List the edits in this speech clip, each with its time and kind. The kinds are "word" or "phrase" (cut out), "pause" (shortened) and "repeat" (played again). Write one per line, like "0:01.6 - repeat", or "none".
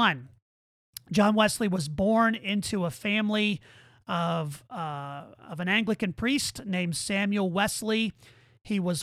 none